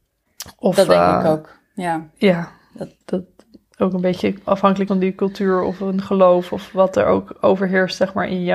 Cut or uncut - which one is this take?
cut